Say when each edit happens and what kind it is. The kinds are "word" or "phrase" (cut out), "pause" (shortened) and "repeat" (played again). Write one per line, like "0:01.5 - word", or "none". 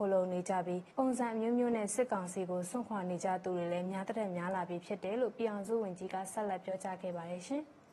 0:00.9 - pause